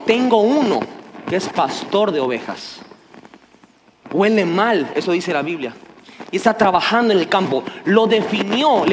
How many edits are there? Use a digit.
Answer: 0